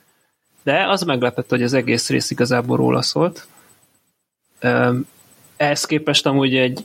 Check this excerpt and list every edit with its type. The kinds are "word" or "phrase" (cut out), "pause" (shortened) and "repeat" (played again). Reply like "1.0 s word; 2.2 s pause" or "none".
none